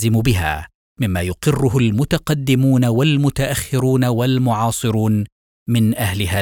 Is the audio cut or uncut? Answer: uncut